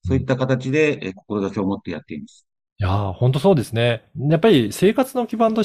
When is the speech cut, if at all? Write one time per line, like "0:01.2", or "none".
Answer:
none